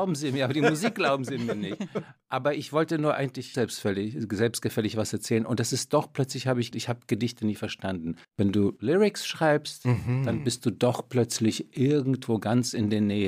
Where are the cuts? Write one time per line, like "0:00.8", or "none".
0:03.5
0:06.7
0:08.2